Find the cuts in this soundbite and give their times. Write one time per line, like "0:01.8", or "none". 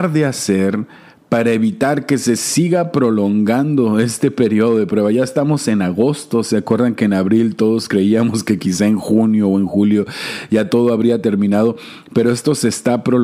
none